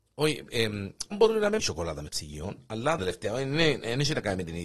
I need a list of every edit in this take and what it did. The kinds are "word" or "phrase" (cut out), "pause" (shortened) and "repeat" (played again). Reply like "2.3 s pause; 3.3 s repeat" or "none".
1.1 s word; 1.6 s phrase; 2.1 s word; 3.0 s phrase